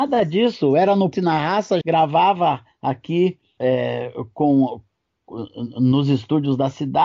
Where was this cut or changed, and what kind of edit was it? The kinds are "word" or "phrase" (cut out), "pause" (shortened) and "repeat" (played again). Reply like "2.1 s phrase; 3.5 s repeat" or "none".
1.1 s word; 1.8 s word; 3.6 s word

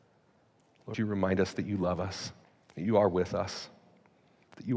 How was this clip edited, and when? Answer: 0.9 s word; 2.4 s pause

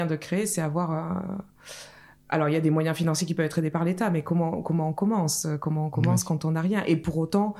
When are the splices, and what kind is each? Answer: none

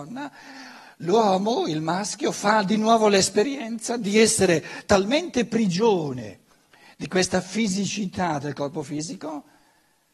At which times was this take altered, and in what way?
none

